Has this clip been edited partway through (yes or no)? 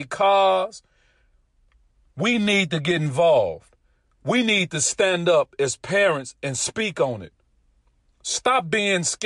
no